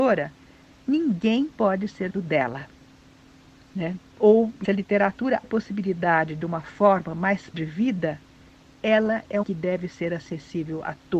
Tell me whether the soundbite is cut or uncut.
cut